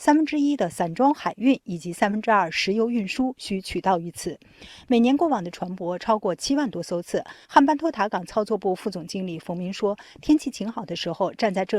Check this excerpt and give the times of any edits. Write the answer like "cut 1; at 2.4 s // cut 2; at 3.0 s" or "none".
cut 1; at 7.4 s